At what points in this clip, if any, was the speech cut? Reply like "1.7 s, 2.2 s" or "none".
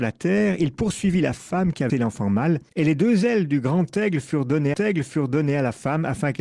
1.9 s, 2.7 s, 4.7 s